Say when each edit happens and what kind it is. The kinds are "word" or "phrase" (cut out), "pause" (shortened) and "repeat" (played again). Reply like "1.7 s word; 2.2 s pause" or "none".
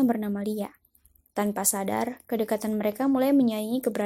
none